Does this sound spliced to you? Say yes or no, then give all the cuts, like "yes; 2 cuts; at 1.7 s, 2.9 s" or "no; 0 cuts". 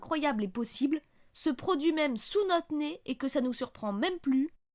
no; 0 cuts